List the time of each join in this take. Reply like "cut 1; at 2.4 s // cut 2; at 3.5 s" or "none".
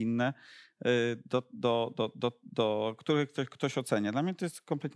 none